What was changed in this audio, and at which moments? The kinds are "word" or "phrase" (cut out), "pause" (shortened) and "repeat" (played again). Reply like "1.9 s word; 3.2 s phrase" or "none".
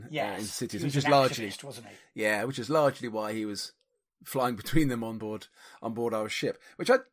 none